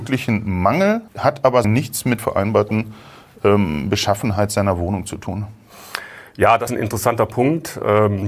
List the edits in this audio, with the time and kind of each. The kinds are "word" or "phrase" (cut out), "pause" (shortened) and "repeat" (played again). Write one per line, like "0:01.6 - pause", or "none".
0:01.1 - pause
0:01.6 - word
0:02.2 - phrase
0:06.7 - word